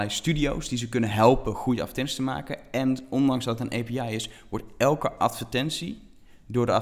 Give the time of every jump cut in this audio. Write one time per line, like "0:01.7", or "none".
none